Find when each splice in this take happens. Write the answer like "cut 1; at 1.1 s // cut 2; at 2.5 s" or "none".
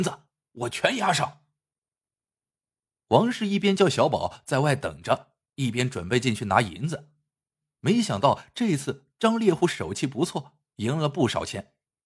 none